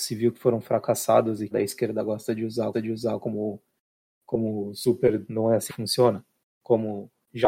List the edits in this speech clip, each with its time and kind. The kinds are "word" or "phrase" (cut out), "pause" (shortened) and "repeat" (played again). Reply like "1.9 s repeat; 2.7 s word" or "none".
1.5 s phrase; 2.7 s repeat; 5.3 s phrase; 5.7 s word